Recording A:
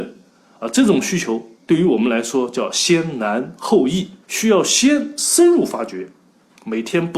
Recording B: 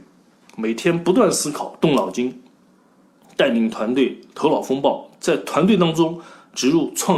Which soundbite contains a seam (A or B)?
A